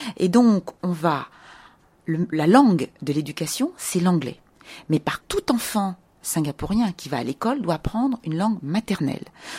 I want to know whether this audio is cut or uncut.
cut